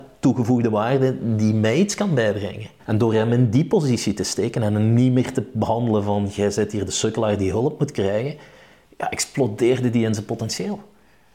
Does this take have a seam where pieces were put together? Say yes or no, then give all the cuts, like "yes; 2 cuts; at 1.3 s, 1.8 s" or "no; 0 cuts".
no; 0 cuts